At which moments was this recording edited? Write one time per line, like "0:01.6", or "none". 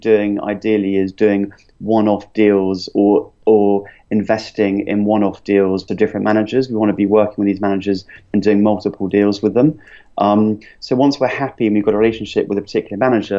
0:05.9